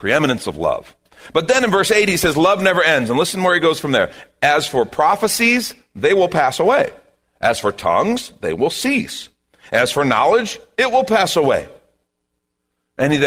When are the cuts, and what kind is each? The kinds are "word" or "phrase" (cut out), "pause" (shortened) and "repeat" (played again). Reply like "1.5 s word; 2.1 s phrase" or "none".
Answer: none